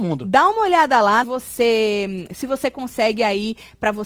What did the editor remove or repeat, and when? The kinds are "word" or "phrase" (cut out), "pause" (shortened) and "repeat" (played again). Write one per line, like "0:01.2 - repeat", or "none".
0:01.2 - phrase